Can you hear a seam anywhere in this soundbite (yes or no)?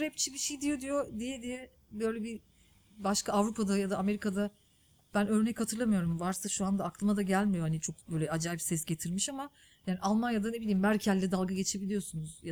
no